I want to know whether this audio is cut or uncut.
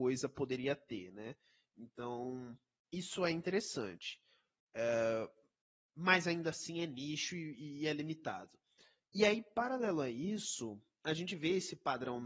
uncut